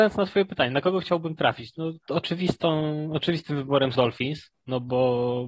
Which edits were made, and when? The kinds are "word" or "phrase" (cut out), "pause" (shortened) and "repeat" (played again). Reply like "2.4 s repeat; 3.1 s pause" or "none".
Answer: 3.9 s word